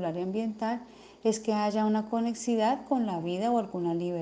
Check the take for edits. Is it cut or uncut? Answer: uncut